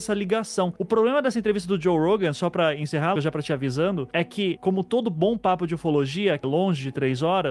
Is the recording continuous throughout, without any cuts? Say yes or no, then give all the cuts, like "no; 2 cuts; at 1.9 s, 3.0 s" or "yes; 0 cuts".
no; 2 cuts; at 3.2 s, 6.4 s